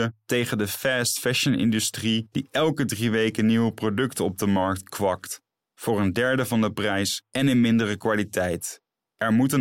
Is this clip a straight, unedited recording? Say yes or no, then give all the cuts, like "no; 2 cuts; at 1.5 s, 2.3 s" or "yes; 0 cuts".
yes; 0 cuts